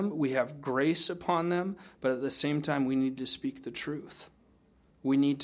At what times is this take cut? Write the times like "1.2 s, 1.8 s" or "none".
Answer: none